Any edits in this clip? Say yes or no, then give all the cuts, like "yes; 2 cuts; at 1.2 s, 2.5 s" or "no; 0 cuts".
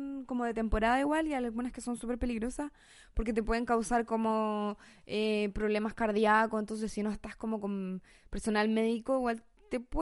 no; 0 cuts